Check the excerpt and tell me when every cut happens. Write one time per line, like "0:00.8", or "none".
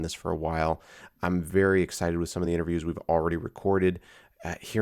none